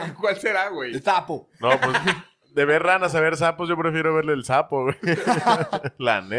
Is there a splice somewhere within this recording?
no; 0 cuts

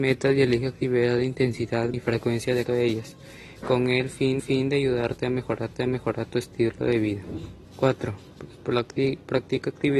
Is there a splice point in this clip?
yes; 6 cuts; at 1.9 s, 2.6 s, 3.6 s, 4.4 s, 5.7 s, 7.6 s

